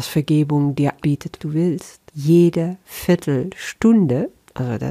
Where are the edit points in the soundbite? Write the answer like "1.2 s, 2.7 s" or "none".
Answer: 1.0 s, 1.4 s, 2.1 s